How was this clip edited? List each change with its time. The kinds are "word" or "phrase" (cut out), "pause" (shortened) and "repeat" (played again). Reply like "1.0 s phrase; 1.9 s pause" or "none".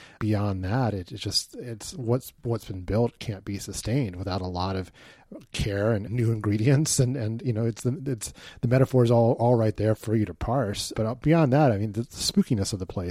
none